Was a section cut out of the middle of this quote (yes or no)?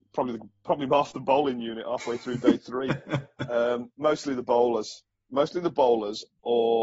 no